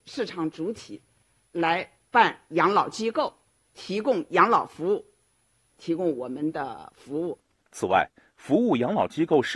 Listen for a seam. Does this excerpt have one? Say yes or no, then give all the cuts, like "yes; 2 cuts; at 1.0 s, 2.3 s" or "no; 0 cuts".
no; 0 cuts